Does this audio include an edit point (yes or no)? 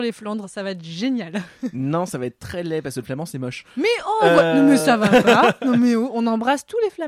no